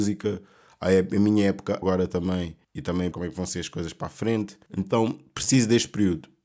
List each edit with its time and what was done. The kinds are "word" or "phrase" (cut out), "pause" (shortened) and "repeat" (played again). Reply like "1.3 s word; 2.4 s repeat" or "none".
1.8 s word; 2.6 s pause; 3.1 s word; 4.7 s pause